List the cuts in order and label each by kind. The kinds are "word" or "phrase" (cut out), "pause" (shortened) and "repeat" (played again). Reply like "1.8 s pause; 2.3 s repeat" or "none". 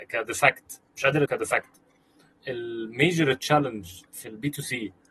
1.3 s word; 2.3 s word; 4.1 s word